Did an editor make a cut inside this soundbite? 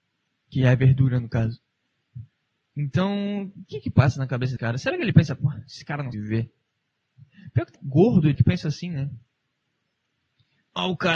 yes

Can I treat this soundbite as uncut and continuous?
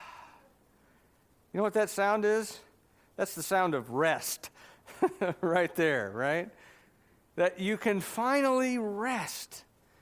yes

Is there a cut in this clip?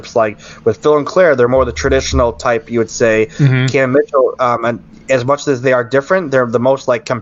no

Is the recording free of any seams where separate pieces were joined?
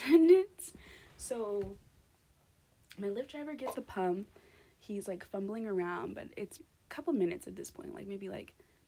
no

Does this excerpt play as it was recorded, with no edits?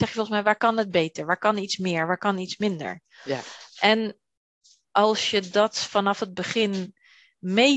yes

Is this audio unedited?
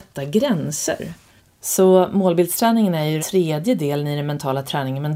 no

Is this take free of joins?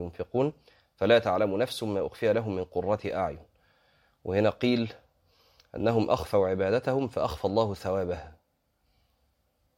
yes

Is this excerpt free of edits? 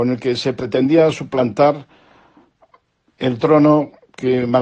yes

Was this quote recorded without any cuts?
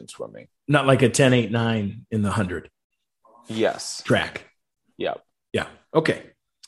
yes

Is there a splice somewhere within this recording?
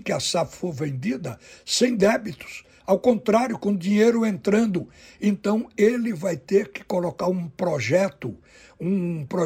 no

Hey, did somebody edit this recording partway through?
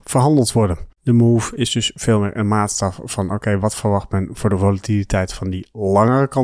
no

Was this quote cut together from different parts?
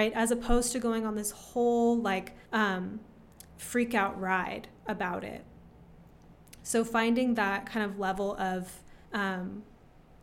yes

